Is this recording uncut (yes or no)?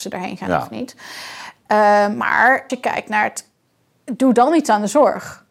no